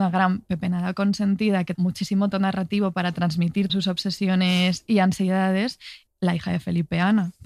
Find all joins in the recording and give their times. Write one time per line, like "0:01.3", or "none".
0:01.7
0:02.3
0:03.7
0:06.1